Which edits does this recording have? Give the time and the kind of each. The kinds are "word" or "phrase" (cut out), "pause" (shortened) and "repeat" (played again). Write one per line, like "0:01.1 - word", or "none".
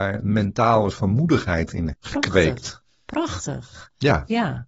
0:00.9 - word
0:01.9 - word